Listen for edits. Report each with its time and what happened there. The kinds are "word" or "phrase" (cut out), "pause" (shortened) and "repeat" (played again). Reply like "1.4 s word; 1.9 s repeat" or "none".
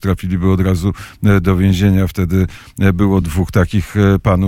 none